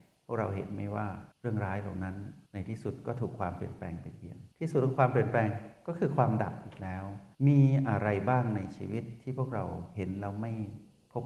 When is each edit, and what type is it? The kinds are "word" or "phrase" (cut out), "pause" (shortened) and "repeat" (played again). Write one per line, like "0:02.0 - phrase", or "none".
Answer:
0:01.3 - pause
0:02.5 - pause
0:04.5 - pause
0:07.3 - pause